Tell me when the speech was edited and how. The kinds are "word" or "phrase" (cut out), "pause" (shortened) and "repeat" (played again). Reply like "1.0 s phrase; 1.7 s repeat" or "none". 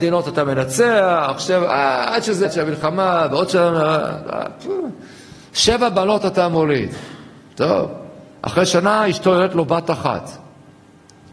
2.4 s word